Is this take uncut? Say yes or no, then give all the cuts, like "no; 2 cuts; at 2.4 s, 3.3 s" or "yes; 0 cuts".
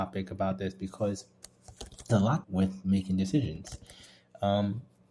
no; 2 cuts; at 2.1 s, 2.4 s